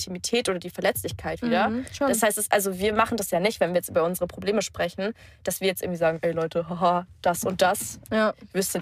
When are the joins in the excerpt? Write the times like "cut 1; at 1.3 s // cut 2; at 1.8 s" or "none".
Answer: none